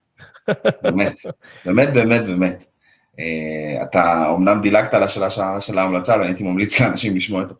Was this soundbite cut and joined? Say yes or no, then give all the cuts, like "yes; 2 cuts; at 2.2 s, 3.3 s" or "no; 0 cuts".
no; 0 cuts